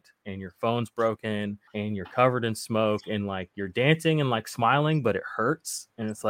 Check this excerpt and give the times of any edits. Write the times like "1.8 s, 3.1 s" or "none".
1.7 s